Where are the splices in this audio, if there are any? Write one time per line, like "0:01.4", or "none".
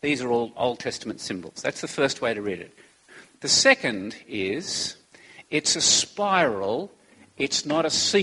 none

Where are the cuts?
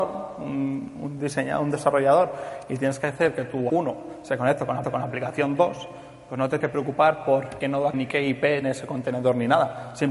0:03.7
0:04.8
0:06.6
0:07.6
0:07.9
0:08.6

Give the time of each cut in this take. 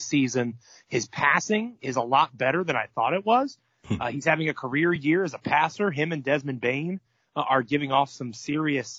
none

